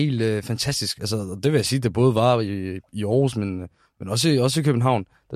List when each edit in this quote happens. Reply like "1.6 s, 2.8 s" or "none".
none